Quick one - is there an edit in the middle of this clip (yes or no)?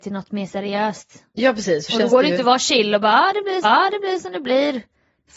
yes